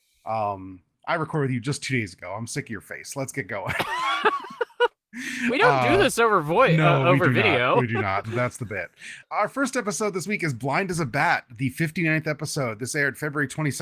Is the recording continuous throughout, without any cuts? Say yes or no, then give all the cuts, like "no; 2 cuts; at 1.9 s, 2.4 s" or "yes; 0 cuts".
no; 2 cuts; at 8.2 s, 9.2 s